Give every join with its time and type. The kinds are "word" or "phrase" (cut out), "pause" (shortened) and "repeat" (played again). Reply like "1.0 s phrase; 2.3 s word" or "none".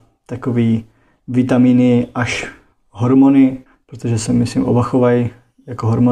3.7 s pause